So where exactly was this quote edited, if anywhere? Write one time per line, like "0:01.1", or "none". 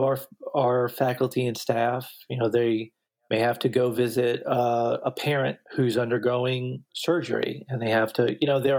0:03.1
0:05.6
0:06.9